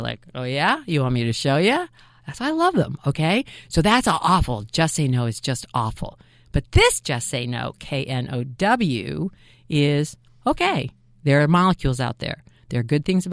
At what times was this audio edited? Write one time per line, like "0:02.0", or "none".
none